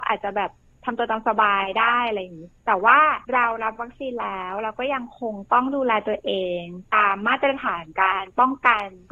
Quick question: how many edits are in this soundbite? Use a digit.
2